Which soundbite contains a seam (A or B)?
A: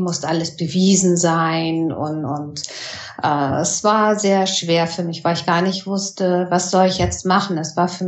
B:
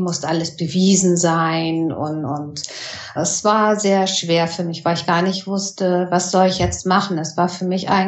B